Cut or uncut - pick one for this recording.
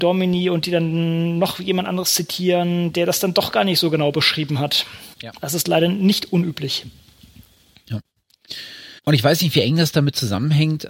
cut